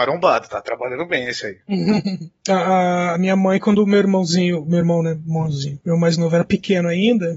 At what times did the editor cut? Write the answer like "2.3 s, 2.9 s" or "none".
none